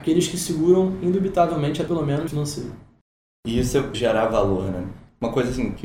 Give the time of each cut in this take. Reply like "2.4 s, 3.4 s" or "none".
1.9 s, 2.3 s, 3.9 s